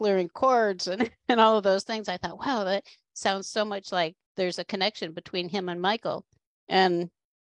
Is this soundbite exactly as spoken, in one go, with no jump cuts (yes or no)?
no